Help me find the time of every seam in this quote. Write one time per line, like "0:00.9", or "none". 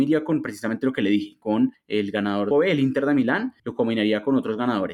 0:02.5